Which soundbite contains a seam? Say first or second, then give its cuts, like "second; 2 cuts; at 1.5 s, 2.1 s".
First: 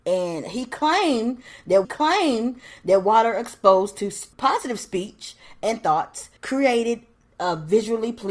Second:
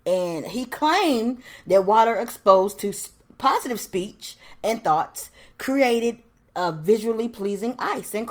first; 3 cuts; at 1.8 s, 4.3 s, 6.4 s